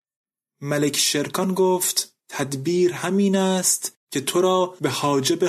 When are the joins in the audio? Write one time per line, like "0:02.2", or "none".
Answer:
0:02.2